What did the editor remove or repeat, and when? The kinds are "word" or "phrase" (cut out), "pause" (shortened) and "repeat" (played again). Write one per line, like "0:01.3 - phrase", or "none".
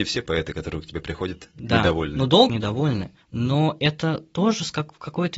0:02.5 - phrase
0:03.2 - pause

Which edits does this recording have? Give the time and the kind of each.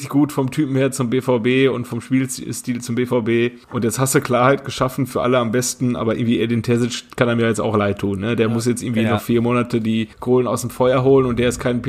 0:03.6 - pause
0:10.1 - pause

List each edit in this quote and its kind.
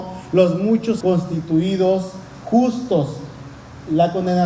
0:01.0 - word

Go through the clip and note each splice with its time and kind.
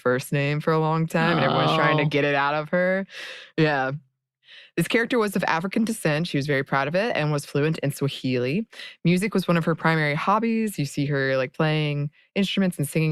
none

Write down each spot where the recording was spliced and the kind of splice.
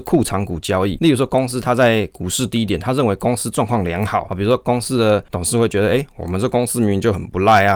0:05.3 - pause

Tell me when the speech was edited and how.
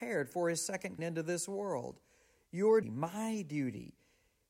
0:01.0 - word
0:02.8 - word

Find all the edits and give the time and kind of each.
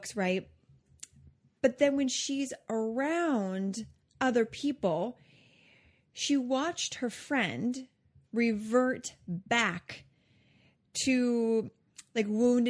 none

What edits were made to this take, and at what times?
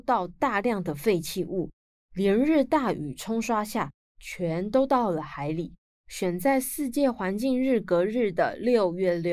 none

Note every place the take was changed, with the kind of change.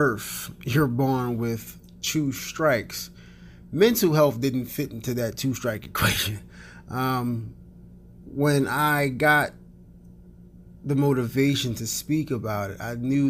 0:08.2 - word

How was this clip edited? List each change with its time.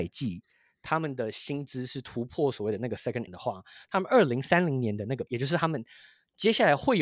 0:03.3 - word
0:05.3 - word

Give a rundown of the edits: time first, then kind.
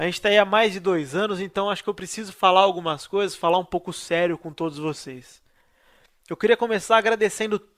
none

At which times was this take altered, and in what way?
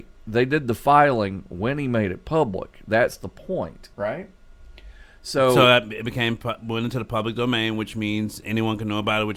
0:03.9 - pause

